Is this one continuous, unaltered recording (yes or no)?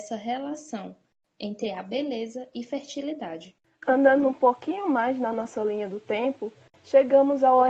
yes